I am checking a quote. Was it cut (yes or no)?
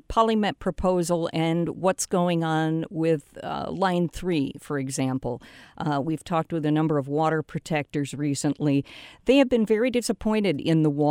no